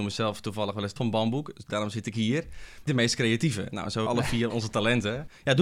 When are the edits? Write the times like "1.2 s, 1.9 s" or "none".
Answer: 1.0 s, 2.9 s, 4.1 s, 4.5 s